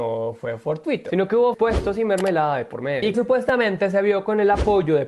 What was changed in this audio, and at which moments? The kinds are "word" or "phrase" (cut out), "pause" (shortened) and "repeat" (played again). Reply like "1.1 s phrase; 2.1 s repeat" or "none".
1.5 s word; 3.1 s word

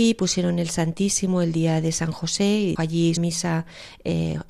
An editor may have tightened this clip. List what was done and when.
2.8 s word; 3.2 s phrase

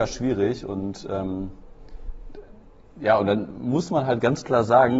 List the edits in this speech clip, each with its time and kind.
none

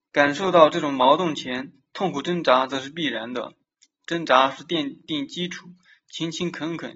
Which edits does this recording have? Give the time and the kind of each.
none

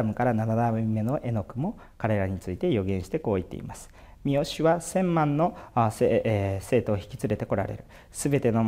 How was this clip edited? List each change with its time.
none

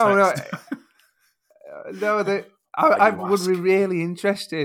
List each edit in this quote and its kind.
none

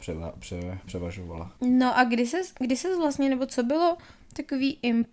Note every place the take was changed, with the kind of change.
1.6 s pause

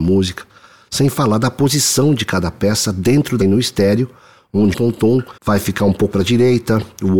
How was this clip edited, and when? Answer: 3.4 s word; 4.7 s word; 5.4 s pause; 6.1 s word

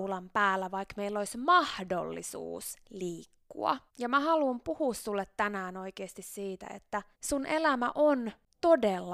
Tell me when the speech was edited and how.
3.9 s pause; 7.1 s pause

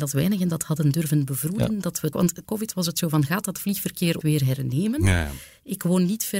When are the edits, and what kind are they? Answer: 2.1 s word; 2.4 s word; 4.2 s word

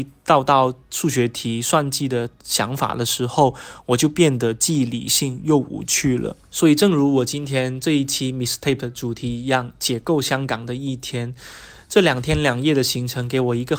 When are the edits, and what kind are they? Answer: none

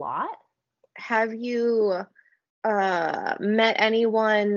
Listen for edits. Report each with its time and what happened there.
none

